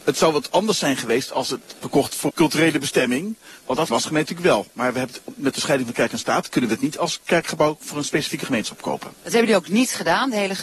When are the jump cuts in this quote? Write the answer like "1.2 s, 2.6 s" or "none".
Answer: 1.8 s, 2.3 s, 3.9 s, 9.2 s